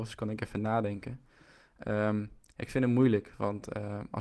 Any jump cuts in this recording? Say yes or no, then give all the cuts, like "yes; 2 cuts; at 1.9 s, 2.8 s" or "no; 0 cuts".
no; 0 cuts